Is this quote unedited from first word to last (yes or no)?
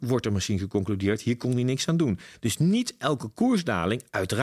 yes